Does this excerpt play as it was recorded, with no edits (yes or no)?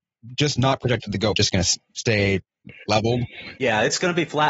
no